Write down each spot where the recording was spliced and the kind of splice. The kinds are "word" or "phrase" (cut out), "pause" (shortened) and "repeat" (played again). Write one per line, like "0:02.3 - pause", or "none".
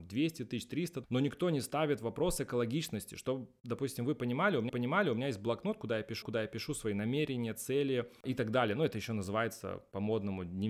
0:01.0 - word
0:04.7 - repeat
0:06.2 - repeat